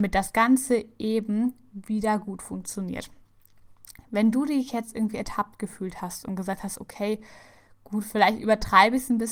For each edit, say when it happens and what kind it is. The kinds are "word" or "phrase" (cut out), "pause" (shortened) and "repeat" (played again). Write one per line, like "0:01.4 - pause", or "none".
none